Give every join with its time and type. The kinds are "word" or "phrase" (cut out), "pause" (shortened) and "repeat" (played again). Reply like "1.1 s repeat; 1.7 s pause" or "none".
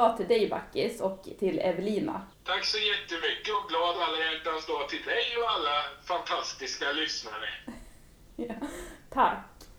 2.3 s pause